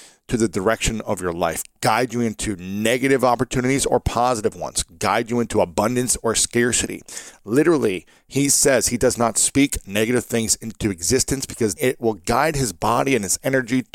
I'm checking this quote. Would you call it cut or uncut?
cut